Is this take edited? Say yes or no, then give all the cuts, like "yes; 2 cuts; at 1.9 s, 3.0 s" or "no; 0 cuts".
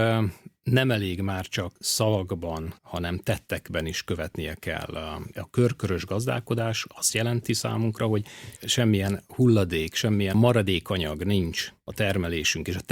yes; 2 cuts; at 2.8 s, 10.3 s